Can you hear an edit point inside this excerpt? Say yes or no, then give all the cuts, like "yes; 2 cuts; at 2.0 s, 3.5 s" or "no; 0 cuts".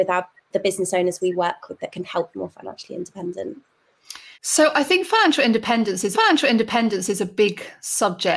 yes; 3 cuts; at 2.3 s, 4.3 s, 6.1 s